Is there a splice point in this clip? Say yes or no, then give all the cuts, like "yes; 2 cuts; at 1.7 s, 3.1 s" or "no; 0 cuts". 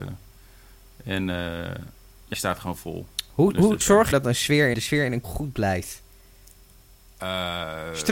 yes; 6 cuts; at 2.3 s, 2.7 s, 3.8 s, 4.1 s, 4.7 s, 5.2 s